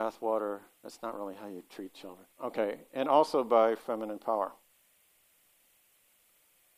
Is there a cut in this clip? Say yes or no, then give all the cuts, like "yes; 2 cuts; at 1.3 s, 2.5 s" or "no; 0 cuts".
yes; 1 cut; at 2.3 s